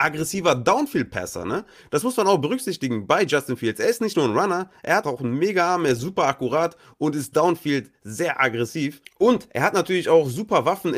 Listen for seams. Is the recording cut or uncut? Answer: cut